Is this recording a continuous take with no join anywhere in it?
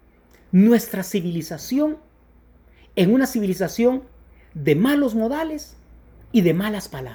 yes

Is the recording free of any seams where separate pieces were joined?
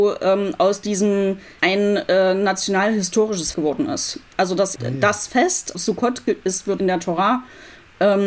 no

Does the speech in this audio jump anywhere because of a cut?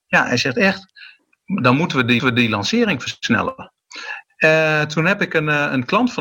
yes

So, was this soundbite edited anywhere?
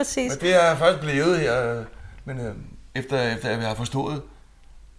no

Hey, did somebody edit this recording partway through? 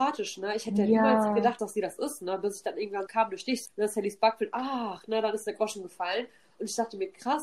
yes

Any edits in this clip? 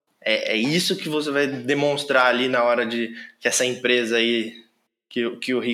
no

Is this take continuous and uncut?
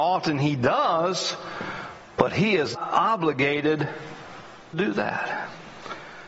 no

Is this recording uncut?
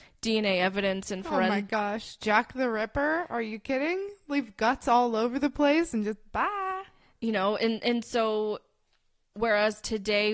yes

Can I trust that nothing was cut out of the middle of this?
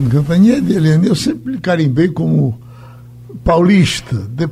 yes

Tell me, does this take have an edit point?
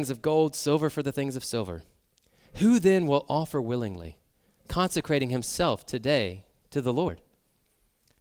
no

